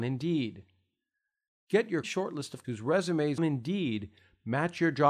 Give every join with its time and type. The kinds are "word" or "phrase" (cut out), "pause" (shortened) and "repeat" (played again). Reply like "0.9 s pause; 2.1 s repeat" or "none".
2.0 s word; 2.6 s word; 3.4 s word